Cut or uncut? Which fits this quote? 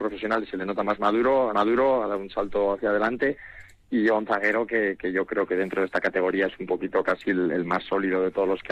cut